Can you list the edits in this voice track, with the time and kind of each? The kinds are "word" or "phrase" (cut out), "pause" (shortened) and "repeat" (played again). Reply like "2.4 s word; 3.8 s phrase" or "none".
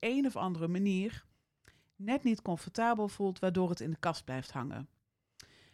none